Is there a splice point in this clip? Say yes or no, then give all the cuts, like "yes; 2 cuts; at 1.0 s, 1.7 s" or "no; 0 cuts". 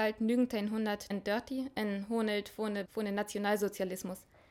yes; 2 cuts; at 1.1 s, 2.9 s